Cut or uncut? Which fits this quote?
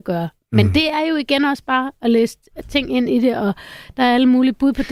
uncut